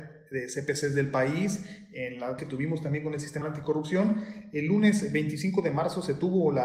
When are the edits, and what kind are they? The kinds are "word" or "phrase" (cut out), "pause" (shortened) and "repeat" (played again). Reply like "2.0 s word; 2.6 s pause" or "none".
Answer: 2.4 s word; 3.4 s word